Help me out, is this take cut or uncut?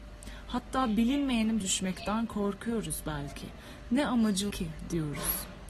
cut